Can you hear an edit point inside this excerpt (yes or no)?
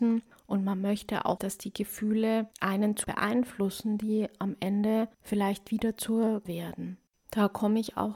yes